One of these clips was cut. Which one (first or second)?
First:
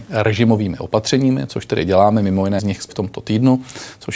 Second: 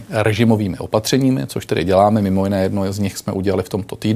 first